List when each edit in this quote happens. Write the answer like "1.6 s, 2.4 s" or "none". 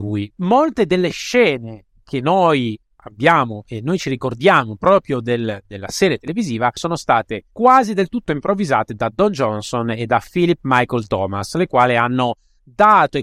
7.5 s